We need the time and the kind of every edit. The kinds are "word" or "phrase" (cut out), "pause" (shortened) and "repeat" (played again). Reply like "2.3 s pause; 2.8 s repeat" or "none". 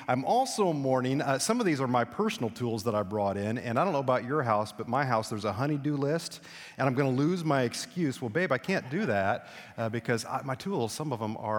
none